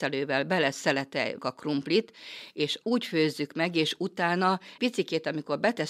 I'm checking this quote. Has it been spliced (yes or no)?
yes